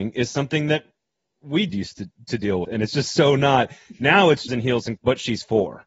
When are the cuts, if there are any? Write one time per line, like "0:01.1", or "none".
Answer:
0:01.7
0:02.6
0:04.5
0:05.0